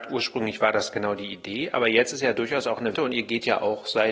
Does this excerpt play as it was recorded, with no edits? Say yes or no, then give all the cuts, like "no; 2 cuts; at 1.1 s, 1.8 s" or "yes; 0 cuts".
no; 2 cuts; at 2.1 s, 2.9 s